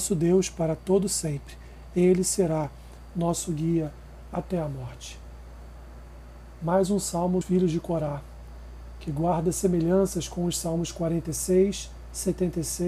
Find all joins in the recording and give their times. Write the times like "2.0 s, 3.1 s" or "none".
7.4 s